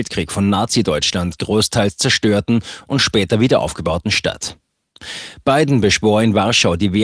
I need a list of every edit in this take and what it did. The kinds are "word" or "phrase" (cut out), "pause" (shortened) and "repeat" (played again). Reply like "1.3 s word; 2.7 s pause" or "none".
none